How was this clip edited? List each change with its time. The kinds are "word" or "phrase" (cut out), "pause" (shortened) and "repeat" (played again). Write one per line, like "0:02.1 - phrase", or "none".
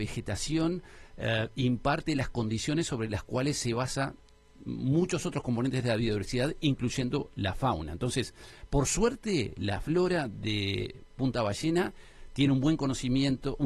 none